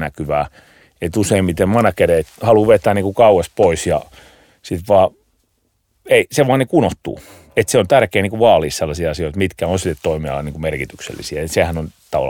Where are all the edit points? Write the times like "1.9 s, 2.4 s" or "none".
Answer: none